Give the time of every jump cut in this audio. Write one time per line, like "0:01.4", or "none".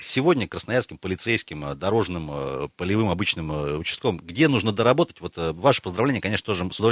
none